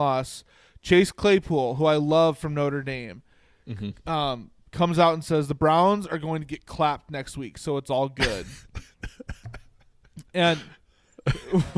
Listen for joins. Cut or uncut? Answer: uncut